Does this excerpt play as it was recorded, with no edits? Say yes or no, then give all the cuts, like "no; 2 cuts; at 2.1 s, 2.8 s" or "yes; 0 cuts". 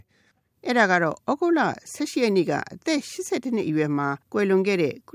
no; 1 cut; at 4.2 s